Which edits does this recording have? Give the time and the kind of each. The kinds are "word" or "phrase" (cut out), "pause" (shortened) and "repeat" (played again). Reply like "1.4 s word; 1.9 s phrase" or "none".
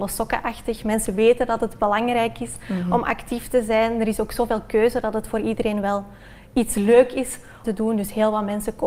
7.6 s word

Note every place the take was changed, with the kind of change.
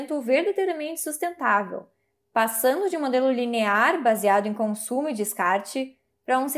none

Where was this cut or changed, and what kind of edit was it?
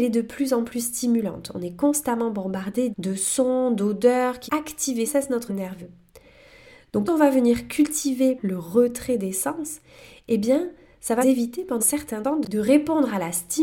2.9 s word; 4.5 s word; 5.1 s word; 5.5 s word; 7.1 s word; 8.4 s word; 11.2 s word; 11.8 s word

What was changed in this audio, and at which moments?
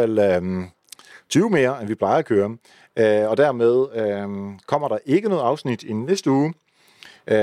none

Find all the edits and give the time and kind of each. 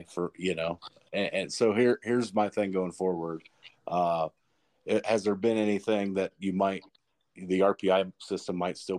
none

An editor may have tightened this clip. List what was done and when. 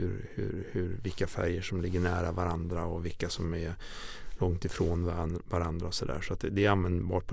none

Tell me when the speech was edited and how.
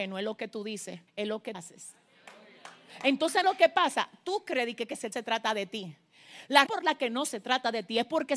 1.1 s pause; 1.5 s word; 3.4 s word; 5.1 s phrase; 6.7 s word

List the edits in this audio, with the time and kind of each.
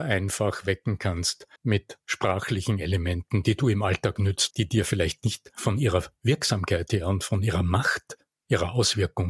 1.6 s pause; 4.5 s word

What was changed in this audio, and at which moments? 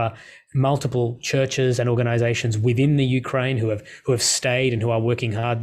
none

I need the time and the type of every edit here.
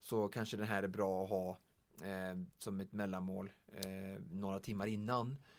none

